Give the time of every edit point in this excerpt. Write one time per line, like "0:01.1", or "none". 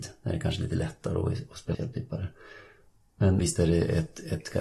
0:01.7
0:03.4

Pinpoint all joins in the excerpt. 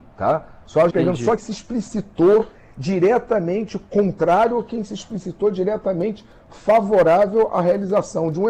0:00.9
0:01.4

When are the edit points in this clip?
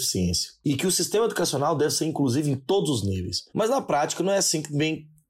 0:03.5

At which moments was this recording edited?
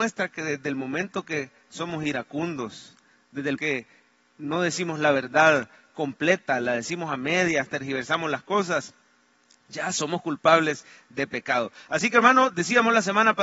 0:03.6

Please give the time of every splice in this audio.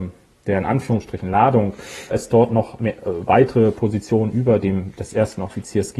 0:02.1

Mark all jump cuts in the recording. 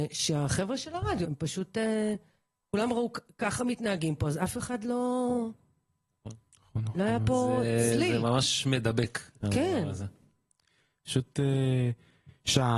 0:01.2

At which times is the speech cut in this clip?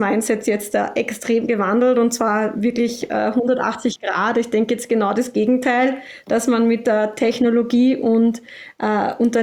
none

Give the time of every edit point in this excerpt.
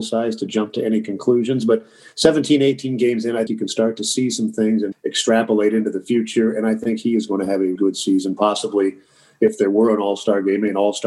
0:03.5
0:04.9
0:07.8

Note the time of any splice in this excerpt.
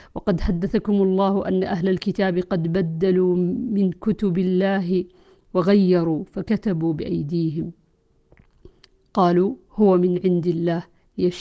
none

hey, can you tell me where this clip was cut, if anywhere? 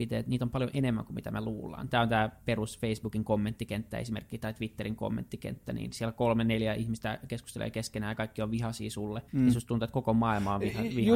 0:09.3

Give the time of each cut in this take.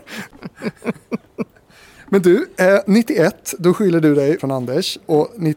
0:04.4

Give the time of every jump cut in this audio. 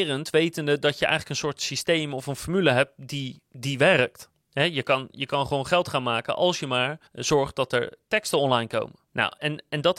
0:03.5
0:04.3
0:07.1

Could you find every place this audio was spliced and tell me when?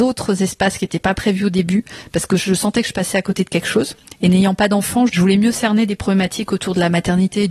0:05.1

